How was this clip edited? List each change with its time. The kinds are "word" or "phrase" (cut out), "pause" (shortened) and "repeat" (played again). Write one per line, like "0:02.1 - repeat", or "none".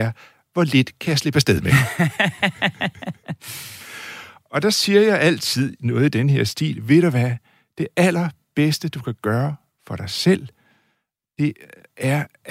none